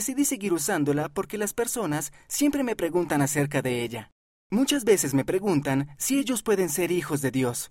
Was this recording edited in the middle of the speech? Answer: no; 0 cuts

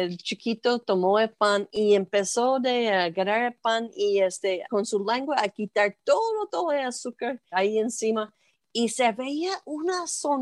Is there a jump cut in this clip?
yes; 2 cuts; at 4.7 s, 7.5 s

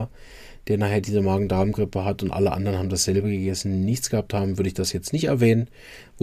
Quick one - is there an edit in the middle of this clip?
no; 0 cuts

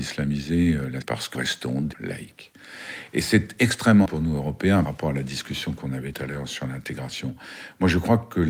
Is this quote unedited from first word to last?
no; 6 cuts; at 1.0 s, 1.3 s, 1.9 s, 4.1 s, 4.9 s, 6.1 s

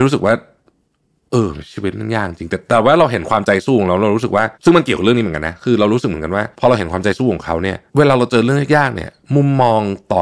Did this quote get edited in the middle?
yes; 3 cuts; at 4.5 s, 6.5 s, 7.9 s

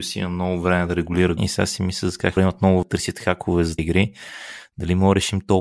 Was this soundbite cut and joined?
yes; 4 cuts; at 1.4 s, 2.4 s, 2.8 s, 3.8 s

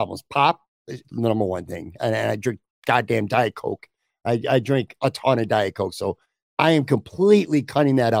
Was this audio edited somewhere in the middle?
yes; 1 cut; at 1.0 s

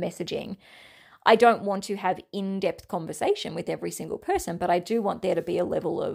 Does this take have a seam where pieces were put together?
no; 0 cuts

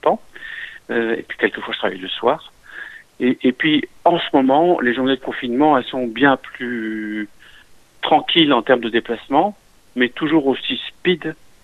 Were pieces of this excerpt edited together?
no; 0 cuts

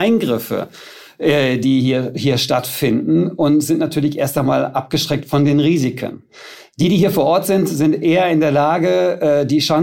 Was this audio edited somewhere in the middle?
no; 0 cuts

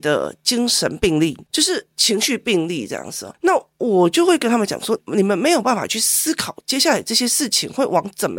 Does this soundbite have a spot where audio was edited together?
yes; 2 cuts; at 1.5 s, 1.9 s

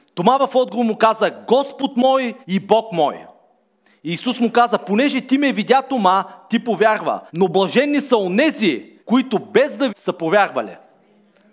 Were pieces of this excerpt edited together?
yes; 4 cuts; at 2.4 s, 7.3 s, 9.0 s, 9.9 s

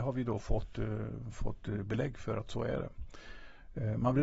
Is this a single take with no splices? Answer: yes; 0 cuts

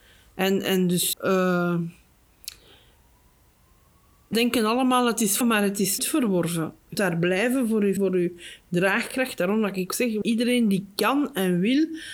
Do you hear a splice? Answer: yes; 8 cuts; at 1.1 s, 4.3 s, 5.4 s, 6.0 s, 6.9 s, 8.0 s, 9.9 s, 10.2 s

